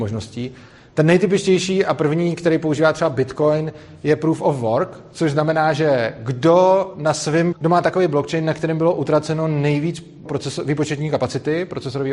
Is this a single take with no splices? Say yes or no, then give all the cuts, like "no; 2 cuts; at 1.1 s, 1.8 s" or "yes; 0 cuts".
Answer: no; 2 cuts; at 7.5 s, 10.3 s